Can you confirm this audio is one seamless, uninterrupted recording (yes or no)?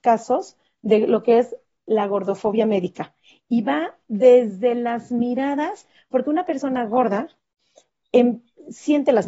yes